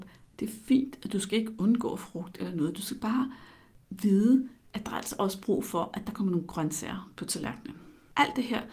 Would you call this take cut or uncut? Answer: uncut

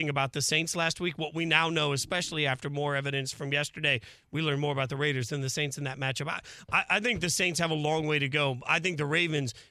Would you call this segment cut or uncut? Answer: uncut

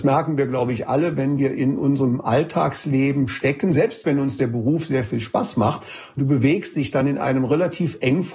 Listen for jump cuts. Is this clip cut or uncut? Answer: uncut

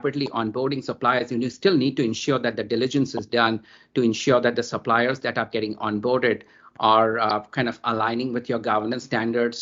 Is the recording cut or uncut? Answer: uncut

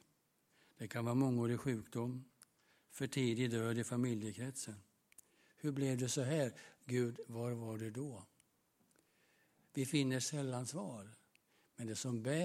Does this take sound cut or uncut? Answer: uncut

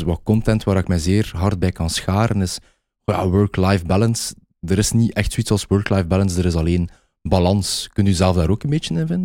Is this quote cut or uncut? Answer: uncut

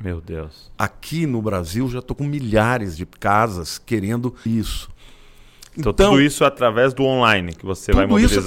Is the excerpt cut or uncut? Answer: cut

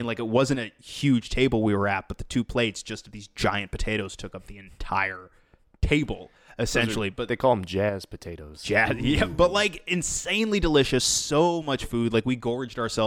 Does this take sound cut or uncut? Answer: uncut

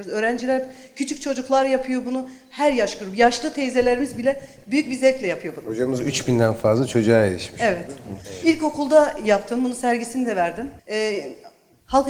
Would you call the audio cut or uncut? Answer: cut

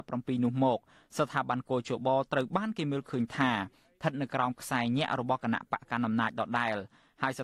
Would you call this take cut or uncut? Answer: uncut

